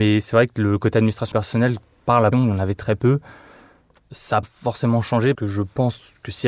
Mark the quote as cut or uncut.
cut